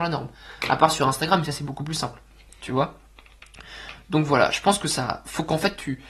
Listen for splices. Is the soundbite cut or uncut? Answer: uncut